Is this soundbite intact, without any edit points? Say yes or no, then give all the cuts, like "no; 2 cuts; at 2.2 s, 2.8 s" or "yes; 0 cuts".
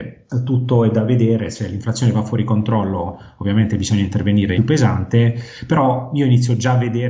no; 1 cut; at 4.6 s